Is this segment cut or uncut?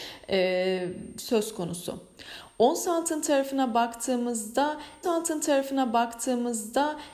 cut